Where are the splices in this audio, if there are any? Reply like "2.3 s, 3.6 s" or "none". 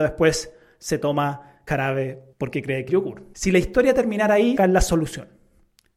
1.7 s, 2.3 s, 2.9 s, 3.3 s, 4.6 s

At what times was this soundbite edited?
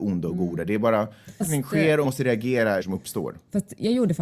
1.4 s, 2.0 s, 2.8 s

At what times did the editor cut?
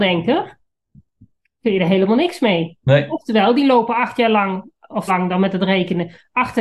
5.1 s

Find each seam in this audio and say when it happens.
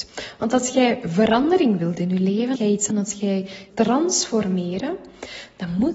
2.6 s, 2.9 s, 3.7 s

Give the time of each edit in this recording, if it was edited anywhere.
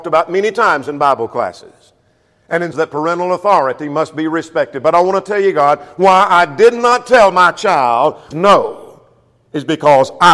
2.7 s, 8.3 s

